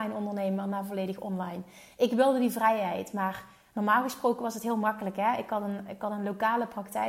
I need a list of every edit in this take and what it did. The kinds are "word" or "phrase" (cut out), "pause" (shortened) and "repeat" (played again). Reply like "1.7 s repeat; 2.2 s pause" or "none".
none